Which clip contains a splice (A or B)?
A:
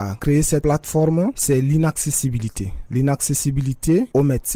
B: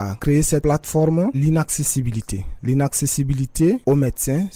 B